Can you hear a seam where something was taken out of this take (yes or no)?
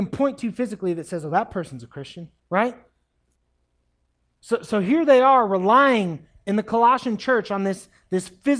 yes